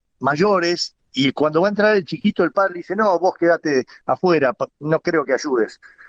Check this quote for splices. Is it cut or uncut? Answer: uncut